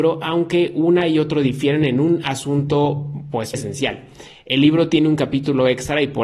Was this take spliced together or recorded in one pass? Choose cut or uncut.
cut